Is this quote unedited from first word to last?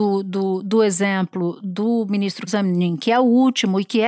no; 1 cut; at 2.5 s

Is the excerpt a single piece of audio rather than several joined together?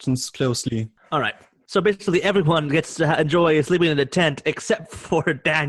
yes; 0 cuts

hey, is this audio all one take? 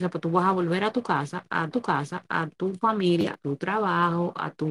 no; 2 cuts; at 1.7 s, 3.3 s

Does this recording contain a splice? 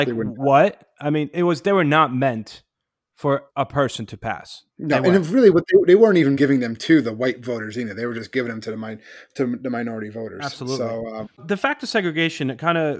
yes; 4 cuts; at 3.5 s, 4.7 s, 6.3 s, 11.4 s

